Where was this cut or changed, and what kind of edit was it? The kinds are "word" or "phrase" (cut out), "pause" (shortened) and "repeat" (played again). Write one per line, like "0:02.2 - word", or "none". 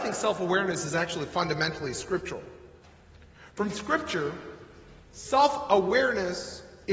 none